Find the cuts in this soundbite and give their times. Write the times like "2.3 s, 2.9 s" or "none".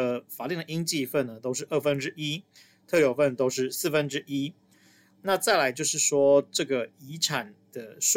none